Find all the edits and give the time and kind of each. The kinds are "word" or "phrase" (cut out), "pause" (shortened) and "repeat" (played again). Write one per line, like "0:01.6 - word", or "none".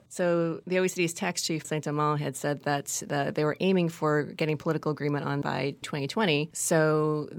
0:01.6 - word
0:05.4 - phrase
0:05.8 - word